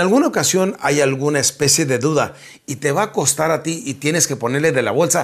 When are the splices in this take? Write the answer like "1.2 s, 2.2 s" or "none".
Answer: none